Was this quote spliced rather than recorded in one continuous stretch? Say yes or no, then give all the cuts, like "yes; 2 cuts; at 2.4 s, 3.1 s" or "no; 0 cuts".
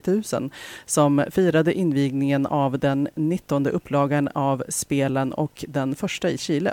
no; 0 cuts